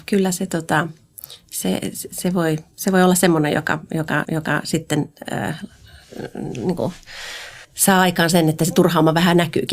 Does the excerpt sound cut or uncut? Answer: cut